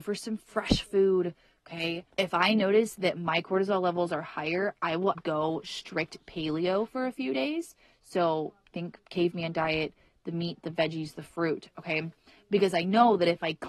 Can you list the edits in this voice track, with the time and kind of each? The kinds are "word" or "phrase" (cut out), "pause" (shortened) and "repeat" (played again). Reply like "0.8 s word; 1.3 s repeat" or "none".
2.1 s pause; 5.1 s word